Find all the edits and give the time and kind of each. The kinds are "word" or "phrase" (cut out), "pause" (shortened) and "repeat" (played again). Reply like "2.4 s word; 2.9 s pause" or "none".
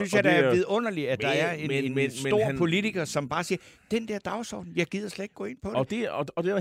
none